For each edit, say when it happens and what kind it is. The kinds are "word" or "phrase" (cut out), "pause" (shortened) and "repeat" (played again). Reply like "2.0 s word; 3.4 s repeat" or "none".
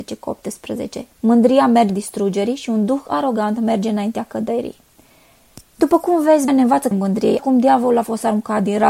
1.1 s pause; 1.9 s word; 5.7 s pause; 6.5 s word; 6.9 s word; 7.4 s word